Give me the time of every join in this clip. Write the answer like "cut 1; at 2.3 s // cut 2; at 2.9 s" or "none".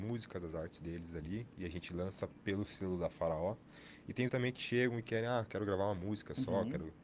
cut 1; at 4.3 s